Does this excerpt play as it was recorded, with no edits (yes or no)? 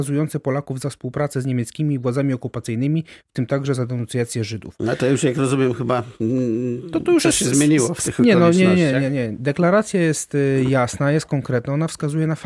yes